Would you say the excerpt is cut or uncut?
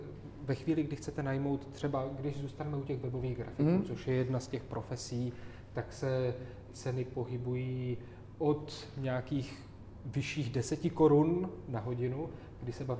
cut